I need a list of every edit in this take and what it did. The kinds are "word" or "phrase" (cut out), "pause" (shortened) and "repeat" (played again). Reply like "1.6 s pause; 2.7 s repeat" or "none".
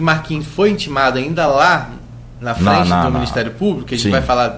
none